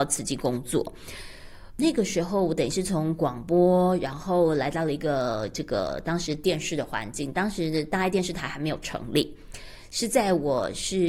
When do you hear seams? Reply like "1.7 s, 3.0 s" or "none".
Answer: 1.8 s

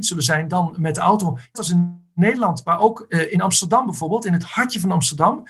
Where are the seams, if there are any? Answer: 1.5 s

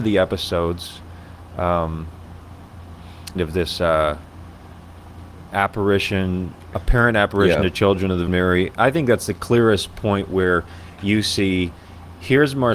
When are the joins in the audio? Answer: 3.4 s, 8.3 s

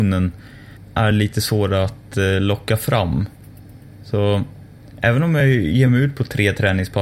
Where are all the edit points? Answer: none

